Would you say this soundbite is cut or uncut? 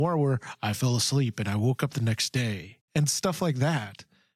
uncut